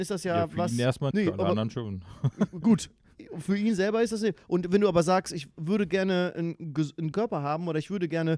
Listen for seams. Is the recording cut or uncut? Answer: cut